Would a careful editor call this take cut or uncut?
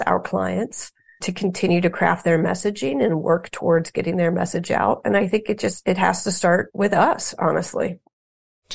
uncut